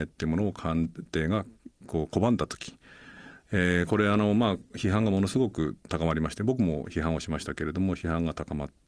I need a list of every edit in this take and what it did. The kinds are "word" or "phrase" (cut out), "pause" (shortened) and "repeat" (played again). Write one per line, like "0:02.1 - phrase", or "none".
none